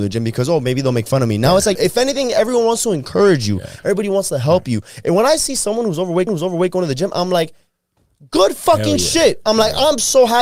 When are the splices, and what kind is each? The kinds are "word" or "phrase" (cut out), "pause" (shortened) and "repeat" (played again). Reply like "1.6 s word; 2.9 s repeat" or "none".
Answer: 1.7 s word; 6.3 s repeat